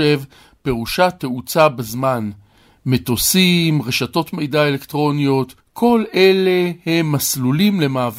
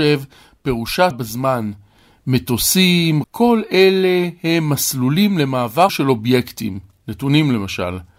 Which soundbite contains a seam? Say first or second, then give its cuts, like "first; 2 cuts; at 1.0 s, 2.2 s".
second; 3 cuts; at 1.1 s, 3.2 s, 5.9 s